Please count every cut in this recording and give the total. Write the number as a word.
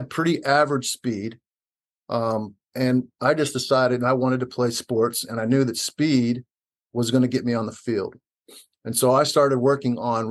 zero